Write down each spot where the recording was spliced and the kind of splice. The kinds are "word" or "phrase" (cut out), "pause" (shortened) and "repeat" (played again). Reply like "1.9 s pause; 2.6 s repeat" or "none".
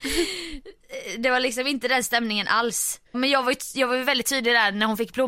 3.1 s word